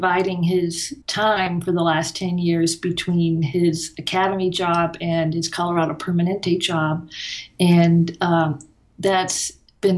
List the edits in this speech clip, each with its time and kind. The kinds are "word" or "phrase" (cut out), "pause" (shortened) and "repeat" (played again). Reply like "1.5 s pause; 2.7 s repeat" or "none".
1.0 s pause